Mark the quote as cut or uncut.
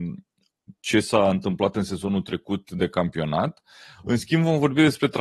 uncut